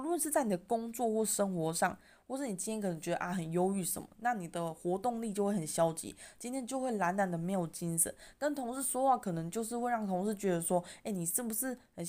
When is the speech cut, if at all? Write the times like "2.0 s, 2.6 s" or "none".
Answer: none